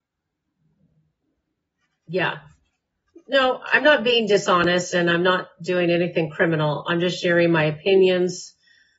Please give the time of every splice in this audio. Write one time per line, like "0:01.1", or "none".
0:02.7